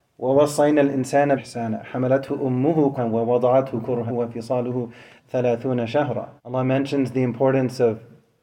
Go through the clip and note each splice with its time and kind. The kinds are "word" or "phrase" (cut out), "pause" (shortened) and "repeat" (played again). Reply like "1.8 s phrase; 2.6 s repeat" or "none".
1.4 s word; 3.0 s word; 4.1 s word; 6.4 s pause